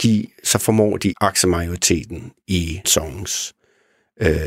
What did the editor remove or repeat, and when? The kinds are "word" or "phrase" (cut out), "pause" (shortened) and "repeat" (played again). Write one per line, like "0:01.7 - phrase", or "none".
0:01.1 - phrase
0:02.8 - word